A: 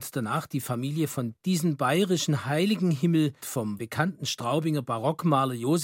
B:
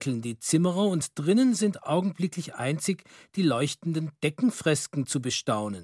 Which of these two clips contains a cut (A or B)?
A